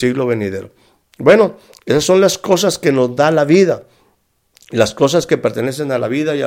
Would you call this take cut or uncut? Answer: uncut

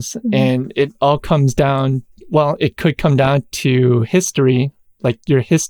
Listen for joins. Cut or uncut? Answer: uncut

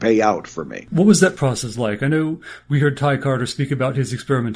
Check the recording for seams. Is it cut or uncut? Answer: uncut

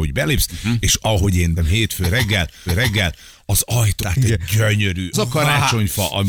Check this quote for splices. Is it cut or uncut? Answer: cut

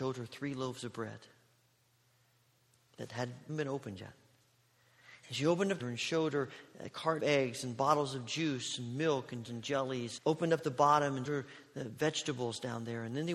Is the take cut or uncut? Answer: cut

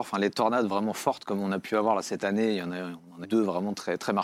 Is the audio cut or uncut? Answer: cut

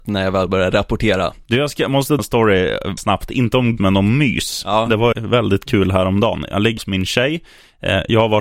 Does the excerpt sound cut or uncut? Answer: cut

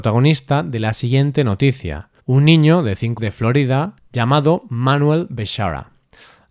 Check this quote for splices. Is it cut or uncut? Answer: cut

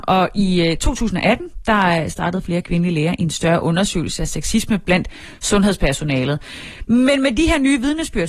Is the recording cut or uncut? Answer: uncut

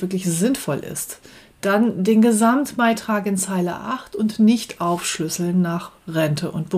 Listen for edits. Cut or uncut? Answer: uncut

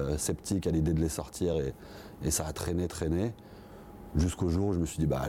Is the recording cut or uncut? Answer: uncut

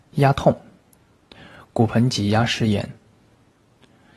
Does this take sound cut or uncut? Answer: uncut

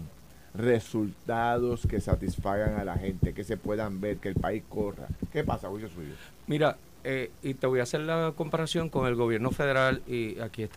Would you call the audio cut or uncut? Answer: uncut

